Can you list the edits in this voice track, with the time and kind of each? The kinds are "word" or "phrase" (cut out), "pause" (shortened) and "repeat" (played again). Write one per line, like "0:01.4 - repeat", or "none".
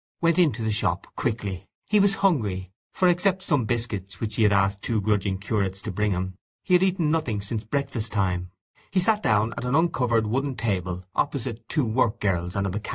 0:01.8 - pause
0:02.8 - pause
0:08.7 - pause

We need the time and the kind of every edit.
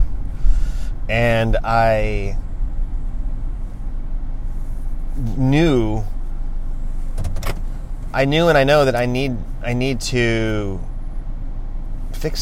0:08.1 - word

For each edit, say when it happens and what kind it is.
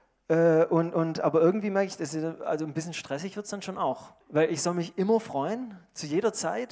0:04.2 - pause

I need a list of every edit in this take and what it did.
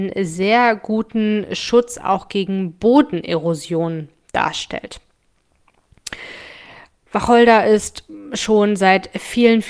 none

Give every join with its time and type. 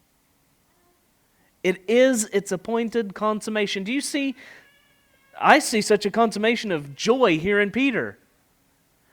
none

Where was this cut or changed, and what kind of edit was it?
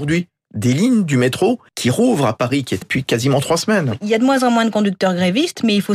0:01.7 - pause
0:02.8 - word

